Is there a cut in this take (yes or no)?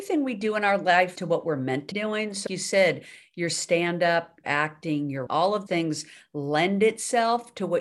yes